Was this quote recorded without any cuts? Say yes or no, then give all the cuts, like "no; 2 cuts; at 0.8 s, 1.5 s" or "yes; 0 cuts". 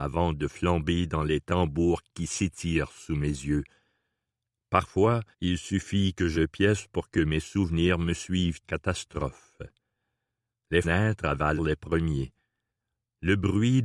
no; 5 cuts; at 5.3 s, 6.3 s, 8.6 s, 10.8 s, 11.6 s